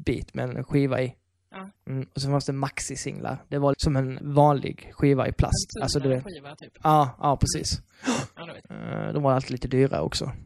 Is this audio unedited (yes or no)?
no